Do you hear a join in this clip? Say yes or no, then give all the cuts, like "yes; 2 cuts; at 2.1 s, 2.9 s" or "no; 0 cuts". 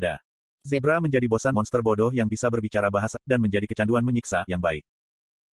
yes; 4 cuts; at 1.5 s, 2.3 s, 3.1 s, 4.5 s